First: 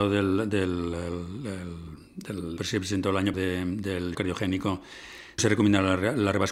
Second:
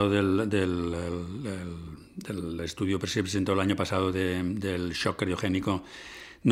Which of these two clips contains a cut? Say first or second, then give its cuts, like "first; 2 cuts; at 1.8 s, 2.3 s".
first; 4 cuts; at 2.6 s, 3.3 s, 4.1 s, 5.4 s